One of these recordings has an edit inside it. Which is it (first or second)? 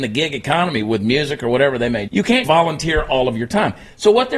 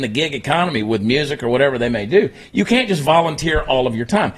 first